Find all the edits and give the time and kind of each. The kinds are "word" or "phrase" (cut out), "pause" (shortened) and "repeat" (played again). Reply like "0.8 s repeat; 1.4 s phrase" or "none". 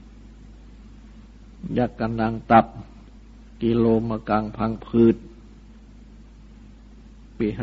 3.2 s pause